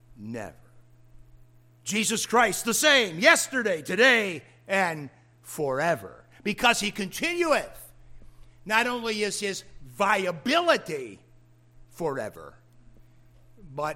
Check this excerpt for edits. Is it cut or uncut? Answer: uncut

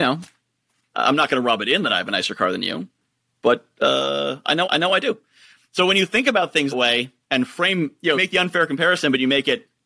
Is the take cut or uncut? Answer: cut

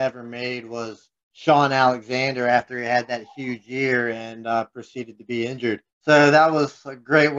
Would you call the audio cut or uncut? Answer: cut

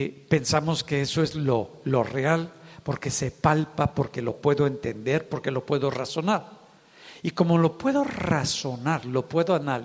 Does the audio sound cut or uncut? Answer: uncut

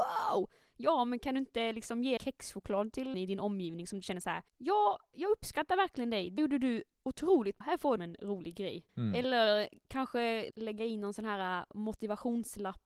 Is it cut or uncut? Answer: cut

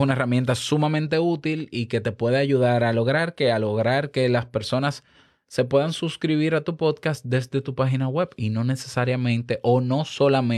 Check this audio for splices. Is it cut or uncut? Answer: uncut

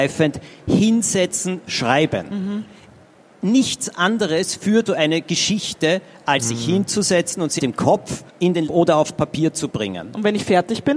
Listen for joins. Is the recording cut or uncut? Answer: cut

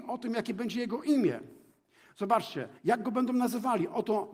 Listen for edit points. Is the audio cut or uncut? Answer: cut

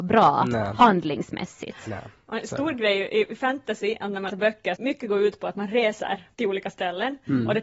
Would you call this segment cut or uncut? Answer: cut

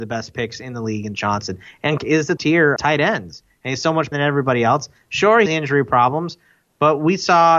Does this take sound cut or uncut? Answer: cut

